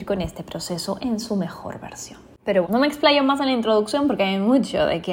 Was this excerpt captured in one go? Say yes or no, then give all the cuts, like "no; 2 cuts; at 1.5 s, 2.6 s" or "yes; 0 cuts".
no; 1 cut; at 2.6 s